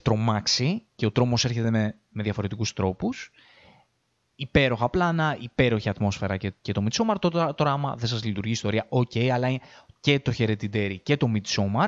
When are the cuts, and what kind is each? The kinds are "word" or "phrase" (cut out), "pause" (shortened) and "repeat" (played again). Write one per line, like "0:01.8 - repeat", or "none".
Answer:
none